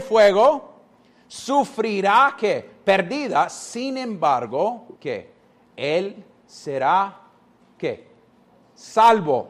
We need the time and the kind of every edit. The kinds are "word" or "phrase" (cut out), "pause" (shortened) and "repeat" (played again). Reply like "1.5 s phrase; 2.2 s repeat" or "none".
5.0 s pause